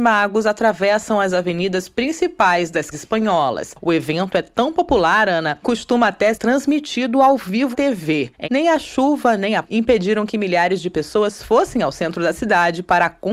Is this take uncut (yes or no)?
no